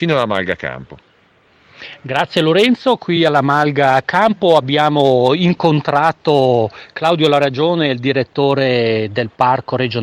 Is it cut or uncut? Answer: uncut